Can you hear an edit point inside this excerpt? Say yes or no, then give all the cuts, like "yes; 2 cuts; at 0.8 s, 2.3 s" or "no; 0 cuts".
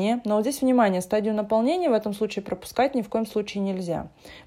no; 0 cuts